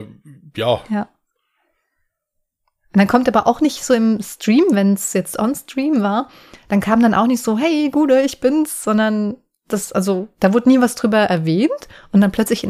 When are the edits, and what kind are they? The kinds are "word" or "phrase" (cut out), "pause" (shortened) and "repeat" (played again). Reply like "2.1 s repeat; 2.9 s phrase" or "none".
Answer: none